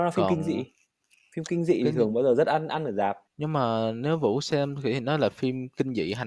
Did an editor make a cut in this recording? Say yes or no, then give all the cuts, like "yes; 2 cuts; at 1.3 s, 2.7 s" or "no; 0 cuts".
yes; 1 cut; at 3.3 s